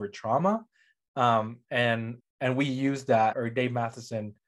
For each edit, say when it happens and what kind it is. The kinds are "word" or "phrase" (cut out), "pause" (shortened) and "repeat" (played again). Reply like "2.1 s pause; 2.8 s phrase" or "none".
2.2 s word; 3.3 s word